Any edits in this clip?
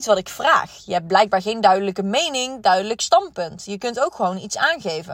no; 0 cuts

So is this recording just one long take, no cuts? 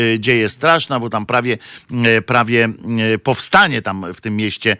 yes; 0 cuts

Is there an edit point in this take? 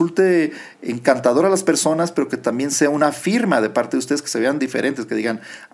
no; 0 cuts

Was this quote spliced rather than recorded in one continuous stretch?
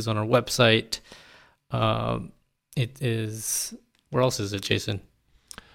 no; 0 cuts

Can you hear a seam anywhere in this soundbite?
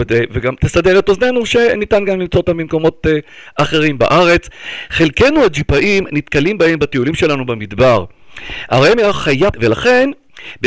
yes; 1 cut; at 9.5 s

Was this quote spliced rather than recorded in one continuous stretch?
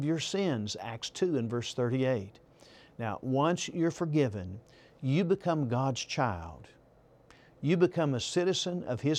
no; 0 cuts

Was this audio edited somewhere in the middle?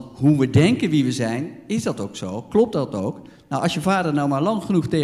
no; 0 cuts

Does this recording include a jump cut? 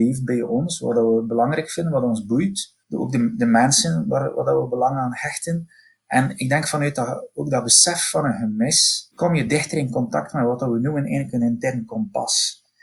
no; 0 cuts

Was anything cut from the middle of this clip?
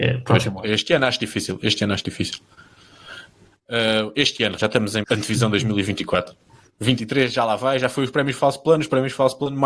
yes; 2 cuts; at 4.6 s, 5.0 s

